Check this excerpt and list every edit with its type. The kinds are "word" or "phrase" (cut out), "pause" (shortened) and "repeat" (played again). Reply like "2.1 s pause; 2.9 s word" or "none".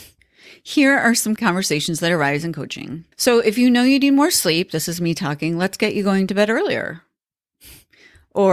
1.4 s word; 3.1 s pause